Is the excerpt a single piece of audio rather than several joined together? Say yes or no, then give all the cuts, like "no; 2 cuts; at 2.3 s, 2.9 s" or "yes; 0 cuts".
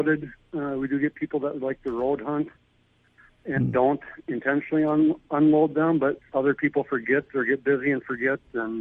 yes; 0 cuts